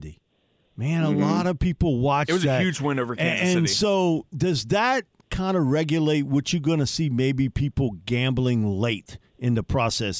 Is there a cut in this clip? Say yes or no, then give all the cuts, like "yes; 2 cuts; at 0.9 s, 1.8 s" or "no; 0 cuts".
no; 0 cuts